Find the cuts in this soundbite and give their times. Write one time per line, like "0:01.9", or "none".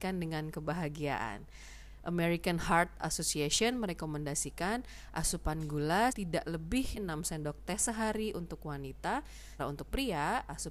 0:06.1
0:07.0
0:09.6